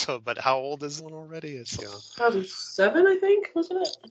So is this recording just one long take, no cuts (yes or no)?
no